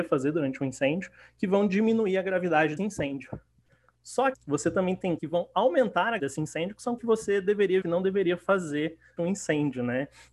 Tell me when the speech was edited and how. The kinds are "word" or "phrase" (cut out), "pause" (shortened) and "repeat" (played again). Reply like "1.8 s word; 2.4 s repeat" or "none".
2.8 s word; 4.3 s word; 5.2 s word; 6.2 s word; 7.0 s word; 7.8 s word; 9.2 s word

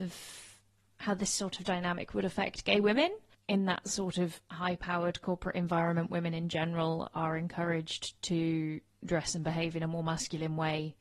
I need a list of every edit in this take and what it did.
none

